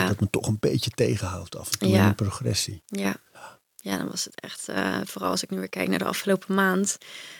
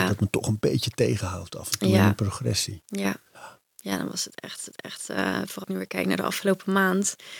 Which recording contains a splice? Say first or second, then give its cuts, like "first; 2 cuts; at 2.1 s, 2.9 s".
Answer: second; 2 cuts; at 4.7 s, 5.6 s